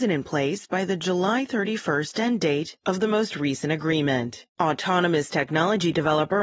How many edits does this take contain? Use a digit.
1